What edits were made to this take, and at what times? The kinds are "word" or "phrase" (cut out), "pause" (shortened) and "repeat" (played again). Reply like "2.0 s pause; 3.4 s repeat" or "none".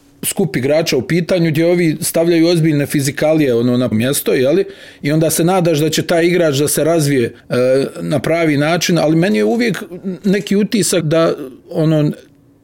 3.9 s word; 7.4 s pause; 11.0 s word; 11.6 s pause